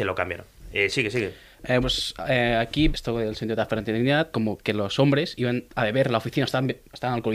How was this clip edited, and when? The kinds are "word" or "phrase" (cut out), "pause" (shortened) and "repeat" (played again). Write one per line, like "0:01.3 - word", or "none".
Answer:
0:01.8 - word
0:02.9 - word
0:04.3 - phrase
0:05.7 - pause